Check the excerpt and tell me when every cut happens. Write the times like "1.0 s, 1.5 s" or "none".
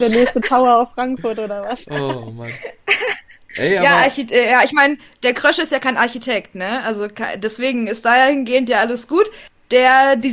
none